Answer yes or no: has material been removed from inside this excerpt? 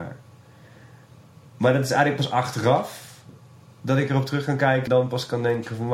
yes